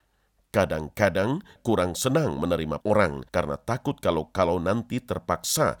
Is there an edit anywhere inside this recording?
yes; 3 cuts; at 1.6 s, 2.8 s, 3.3 s

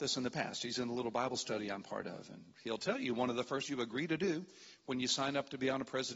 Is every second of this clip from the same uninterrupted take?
no; 1 cut; at 3.6 s

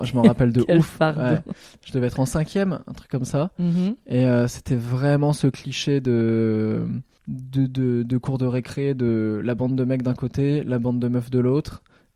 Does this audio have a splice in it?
no; 0 cuts

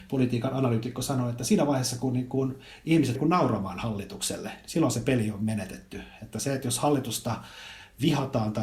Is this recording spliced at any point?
yes; 1 cut; at 3.2 s

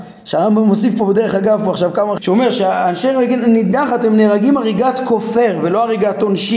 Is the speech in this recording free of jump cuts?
no; 1 cut; at 2.2 s

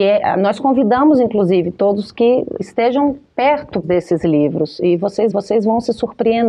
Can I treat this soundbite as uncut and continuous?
no; 3 cuts; at 2.6 s, 3.8 s, 5.3 s

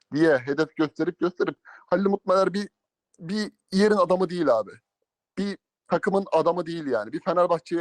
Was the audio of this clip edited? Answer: no; 0 cuts

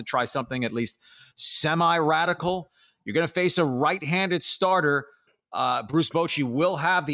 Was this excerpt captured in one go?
yes; 0 cuts

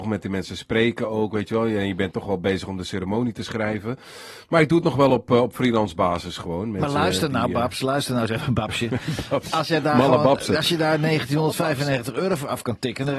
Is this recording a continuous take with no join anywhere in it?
yes; 0 cuts

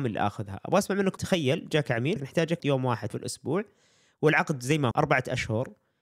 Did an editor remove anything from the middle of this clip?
yes; 5 cuts; at 1.2 s, 2.2 s, 2.6 s, 3.1 s, 4.9 s

